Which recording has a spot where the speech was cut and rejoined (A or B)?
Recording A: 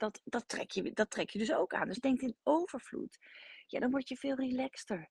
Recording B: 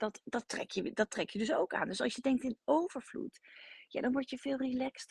A